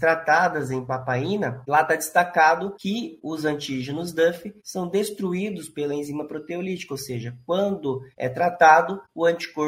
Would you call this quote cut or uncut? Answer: uncut